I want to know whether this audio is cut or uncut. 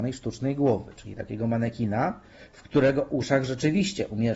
uncut